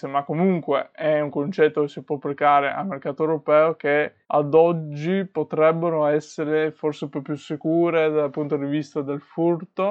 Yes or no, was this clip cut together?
yes